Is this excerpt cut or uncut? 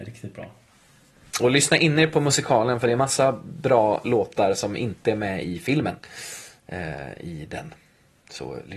uncut